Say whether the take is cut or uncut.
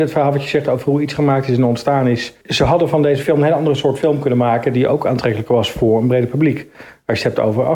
cut